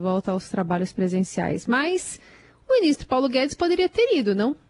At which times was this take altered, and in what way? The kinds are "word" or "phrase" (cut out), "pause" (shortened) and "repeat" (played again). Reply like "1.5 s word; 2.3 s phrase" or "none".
none